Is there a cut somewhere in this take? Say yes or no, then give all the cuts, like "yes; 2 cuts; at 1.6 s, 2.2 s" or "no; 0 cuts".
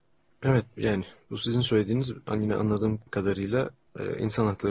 yes; 1 cut; at 3.1 s